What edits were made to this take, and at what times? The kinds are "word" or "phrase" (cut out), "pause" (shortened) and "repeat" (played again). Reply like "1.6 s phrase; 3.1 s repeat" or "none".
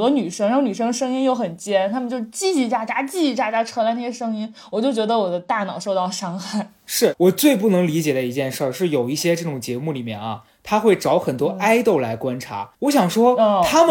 12.7 s pause